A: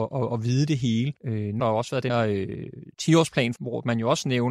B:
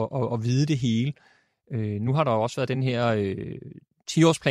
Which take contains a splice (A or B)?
A